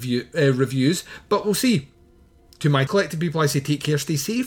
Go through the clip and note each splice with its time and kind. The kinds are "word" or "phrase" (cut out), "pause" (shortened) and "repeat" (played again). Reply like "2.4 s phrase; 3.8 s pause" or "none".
2.9 s word

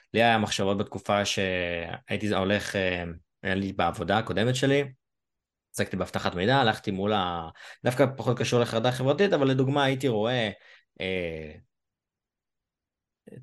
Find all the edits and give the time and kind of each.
none

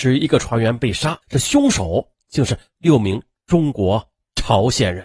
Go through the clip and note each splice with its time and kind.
1.2 s pause

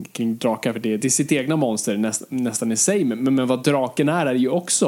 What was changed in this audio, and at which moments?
1.0 s word

